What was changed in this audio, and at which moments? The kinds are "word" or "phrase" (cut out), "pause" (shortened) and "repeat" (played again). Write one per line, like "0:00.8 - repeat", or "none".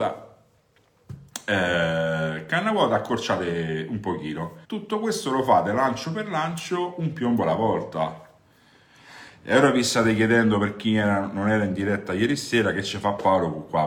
0:04.6 - pause